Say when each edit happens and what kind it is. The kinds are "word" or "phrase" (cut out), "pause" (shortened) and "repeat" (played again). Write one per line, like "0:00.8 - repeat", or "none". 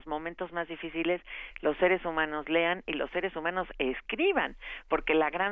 none